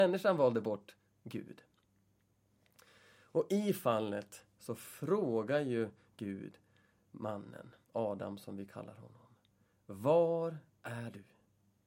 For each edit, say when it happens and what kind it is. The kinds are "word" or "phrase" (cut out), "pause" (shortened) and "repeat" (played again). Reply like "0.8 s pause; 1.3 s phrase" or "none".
7.8 s pause